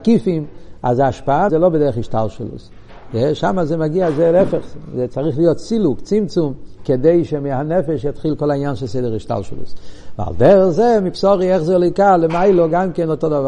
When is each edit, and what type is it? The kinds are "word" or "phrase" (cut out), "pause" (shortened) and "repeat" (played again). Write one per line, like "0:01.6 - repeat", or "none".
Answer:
0:01.5 - word